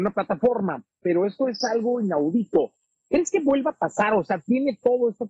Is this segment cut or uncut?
uncut